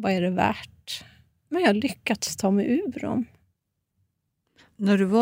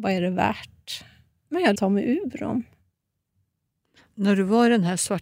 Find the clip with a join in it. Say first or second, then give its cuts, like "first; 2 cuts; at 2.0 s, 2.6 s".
second; 1 cut; at 1.7 s